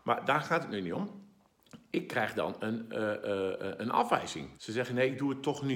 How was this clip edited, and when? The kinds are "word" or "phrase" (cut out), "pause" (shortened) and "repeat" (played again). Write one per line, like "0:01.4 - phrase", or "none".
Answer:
0:04.5 - pause